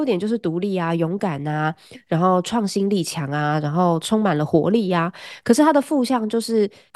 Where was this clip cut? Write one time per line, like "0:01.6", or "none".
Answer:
none